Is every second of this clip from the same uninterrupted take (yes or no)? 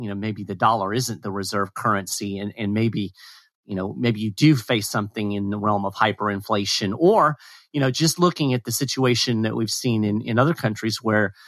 yes